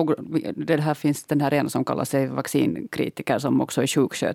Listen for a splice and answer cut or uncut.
uncut